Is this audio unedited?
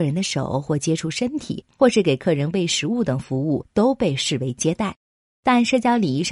yes; 0 cuts

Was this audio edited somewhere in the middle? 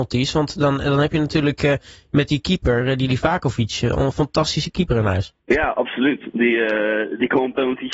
yes; 1 cut; at 5.4 s

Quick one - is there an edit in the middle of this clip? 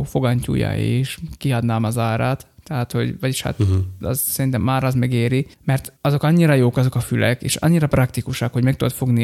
no; 0 cuts

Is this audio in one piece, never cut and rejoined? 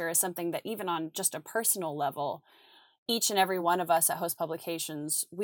yes; 0 cuts

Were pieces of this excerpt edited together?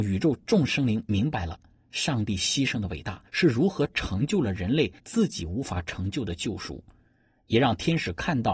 yes; 2 cuts; at 3.3 s, 5.0 s

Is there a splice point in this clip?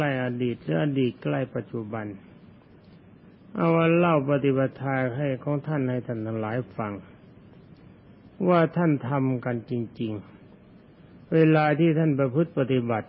no; 0 cuts

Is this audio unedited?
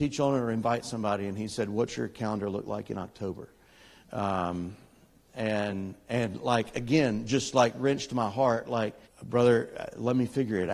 no; 1 cut; at 9.0 s

